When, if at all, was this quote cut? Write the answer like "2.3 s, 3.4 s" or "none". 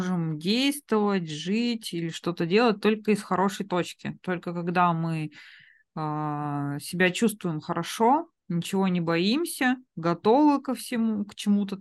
8.4 s, 9.9 s